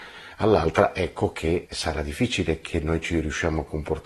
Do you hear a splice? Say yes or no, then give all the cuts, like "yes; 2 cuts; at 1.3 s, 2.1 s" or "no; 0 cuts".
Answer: yes; 1 cut; at 1.7 s